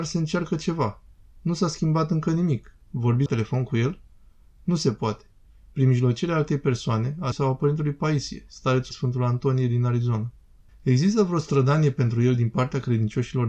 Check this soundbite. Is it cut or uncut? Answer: cut